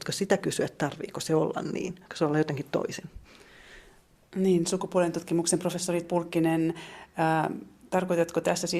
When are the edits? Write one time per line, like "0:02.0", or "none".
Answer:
0:02.1
0:06.0